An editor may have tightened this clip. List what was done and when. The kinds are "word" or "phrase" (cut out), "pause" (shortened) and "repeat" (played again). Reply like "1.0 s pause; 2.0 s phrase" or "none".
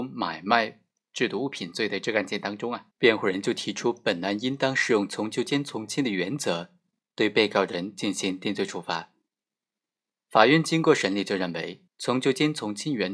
2.9 s pause; 11.9 s pause